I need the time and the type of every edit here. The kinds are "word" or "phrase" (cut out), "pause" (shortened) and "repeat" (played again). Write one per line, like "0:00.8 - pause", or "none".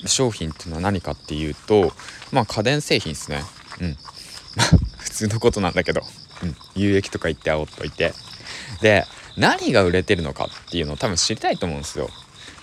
none